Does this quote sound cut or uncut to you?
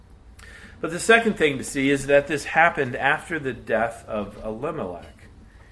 uncut